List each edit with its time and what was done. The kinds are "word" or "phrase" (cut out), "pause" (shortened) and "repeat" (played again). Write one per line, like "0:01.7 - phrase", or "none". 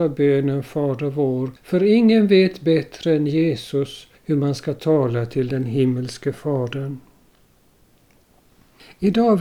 0:01.6 - pause
0:04.2 - pause